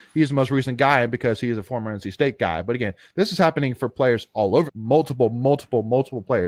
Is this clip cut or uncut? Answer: cut